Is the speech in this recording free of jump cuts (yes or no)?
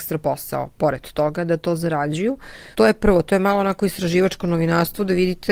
no